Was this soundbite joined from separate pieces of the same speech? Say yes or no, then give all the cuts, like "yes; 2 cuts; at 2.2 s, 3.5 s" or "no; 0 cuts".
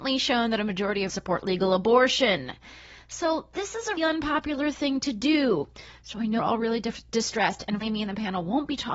yes; 4 cuts; at 1.1 s, 4.0 s, 6.4 s, 7.8 s